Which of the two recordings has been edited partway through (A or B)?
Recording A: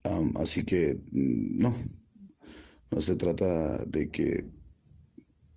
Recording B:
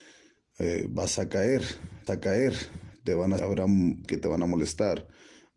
B